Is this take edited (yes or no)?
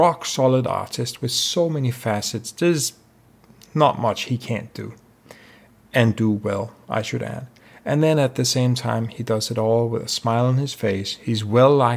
no